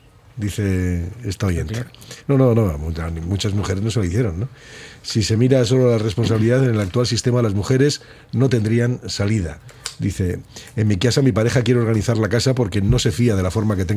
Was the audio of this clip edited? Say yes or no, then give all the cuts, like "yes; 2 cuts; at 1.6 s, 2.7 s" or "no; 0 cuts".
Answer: no; 0 cuts